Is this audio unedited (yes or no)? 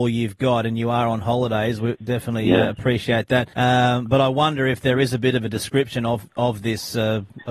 no